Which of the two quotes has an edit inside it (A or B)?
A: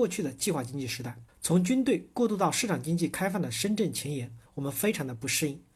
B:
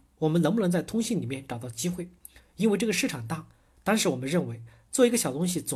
A